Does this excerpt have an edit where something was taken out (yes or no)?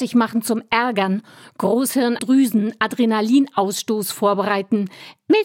yes